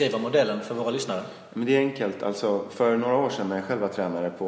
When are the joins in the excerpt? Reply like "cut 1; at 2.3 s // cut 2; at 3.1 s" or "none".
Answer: none

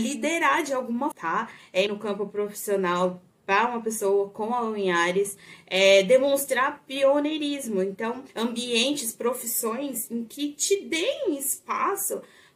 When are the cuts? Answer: cut 1; at 1.1 s // cut 2; at 1.9 s // cut 3; at 8.3 s

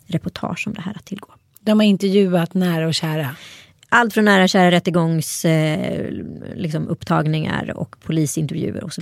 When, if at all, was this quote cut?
none

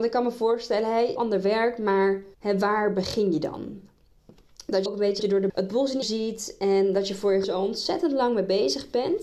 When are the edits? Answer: cut 1; at 1.2 s // cut 2; at 2.3 s // cut 3; at 4.9 s // cut 4; at 5.2 s // cut 5; at 5.5 s // cut 6; at 6.0 s // cut 7; at 7.4 s

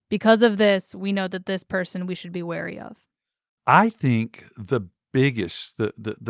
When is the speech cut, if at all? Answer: cut 1; at 4.5 s

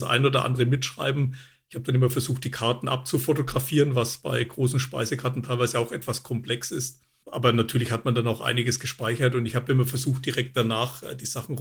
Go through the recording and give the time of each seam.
none

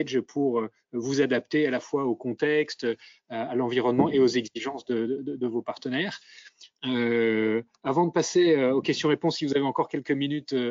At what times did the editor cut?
none

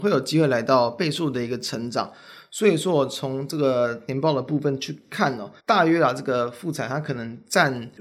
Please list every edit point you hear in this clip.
cut 1; at 5.6 s

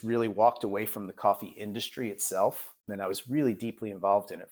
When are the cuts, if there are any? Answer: cut 1; at 2.8 s

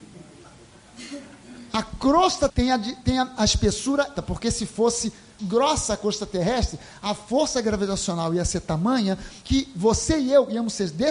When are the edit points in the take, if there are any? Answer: cut 1; at 2.5 s // cut 2; at 3.4 s // cut 3; at 4.1 s // cut 4; at 5.4 s

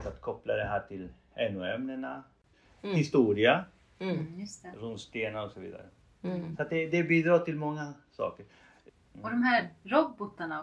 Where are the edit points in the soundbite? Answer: none

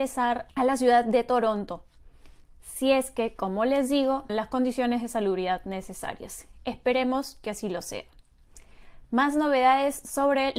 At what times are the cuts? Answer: cut 1; at 4.3 s

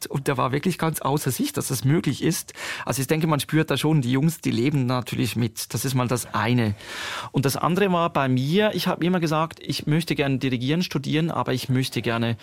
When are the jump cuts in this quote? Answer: none

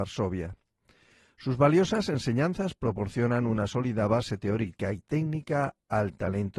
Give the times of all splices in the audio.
none

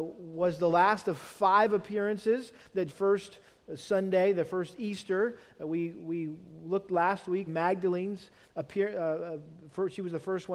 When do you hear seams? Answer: cut 1; at 2.9 s // cut 2; at 7.5 s

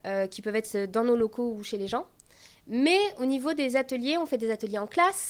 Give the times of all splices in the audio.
none

